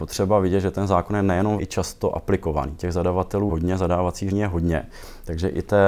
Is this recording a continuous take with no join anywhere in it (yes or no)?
no